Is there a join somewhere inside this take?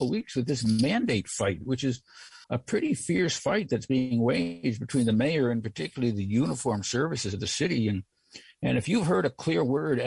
yes; 1 cut; at 2.4 s

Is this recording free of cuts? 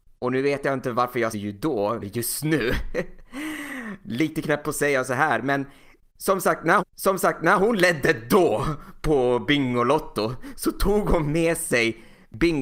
no; 3 cuts; at 1.3 s, 2.0 s, 6.8 s

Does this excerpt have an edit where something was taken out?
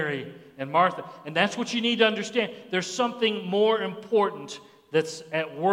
no; 0 cuts

